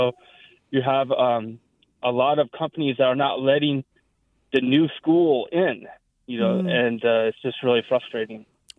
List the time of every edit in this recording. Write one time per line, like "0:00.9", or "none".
none